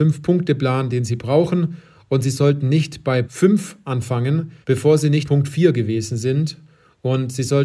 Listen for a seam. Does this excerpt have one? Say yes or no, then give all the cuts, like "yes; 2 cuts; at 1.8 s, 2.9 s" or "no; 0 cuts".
yes; 3 cuts; at 3.2 s, 4.6 s, 5.3 s